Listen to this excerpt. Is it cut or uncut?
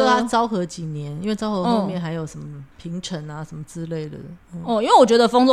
cut